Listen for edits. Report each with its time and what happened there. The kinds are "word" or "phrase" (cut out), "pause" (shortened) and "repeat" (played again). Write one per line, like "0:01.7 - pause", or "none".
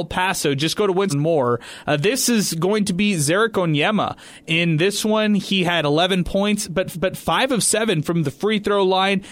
0:01.1 - phrase
0:06.9 - repeat